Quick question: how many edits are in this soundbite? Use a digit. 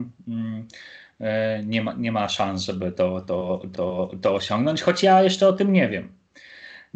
1